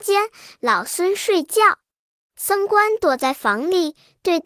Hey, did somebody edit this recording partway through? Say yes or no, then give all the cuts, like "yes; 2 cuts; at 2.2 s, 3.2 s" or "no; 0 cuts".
no; 0 cuts